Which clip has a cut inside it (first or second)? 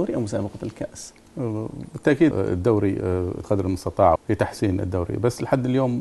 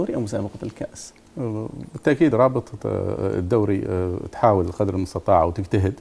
first